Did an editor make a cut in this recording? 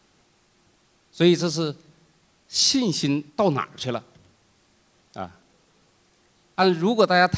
yes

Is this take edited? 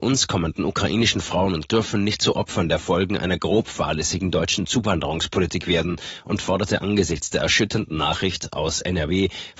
yes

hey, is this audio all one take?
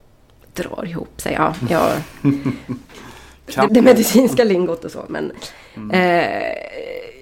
no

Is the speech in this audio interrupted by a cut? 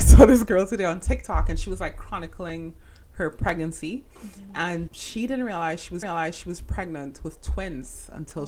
yes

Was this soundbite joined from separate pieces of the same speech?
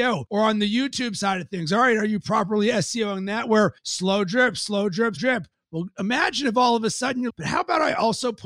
yes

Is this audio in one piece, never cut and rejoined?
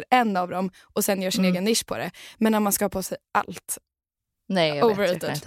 yes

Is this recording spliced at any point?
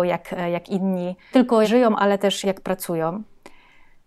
yes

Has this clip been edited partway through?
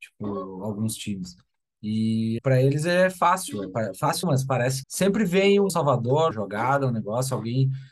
yes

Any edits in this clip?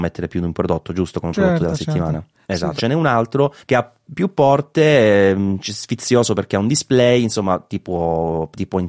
yes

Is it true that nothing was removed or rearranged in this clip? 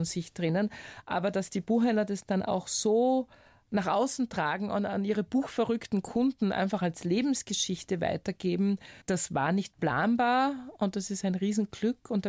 no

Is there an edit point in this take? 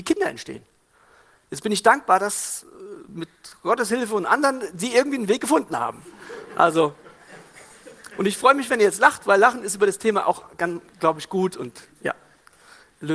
yes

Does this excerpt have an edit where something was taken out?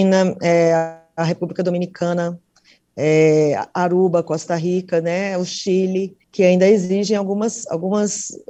yes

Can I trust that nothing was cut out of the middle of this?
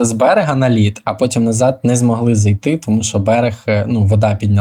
yes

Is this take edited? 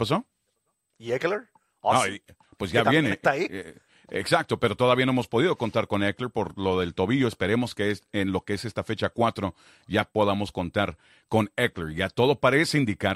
no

